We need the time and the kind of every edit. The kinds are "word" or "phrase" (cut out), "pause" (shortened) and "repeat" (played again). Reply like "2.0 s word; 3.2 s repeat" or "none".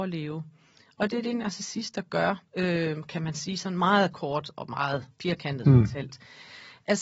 2.5 s pause; 5.1 s pause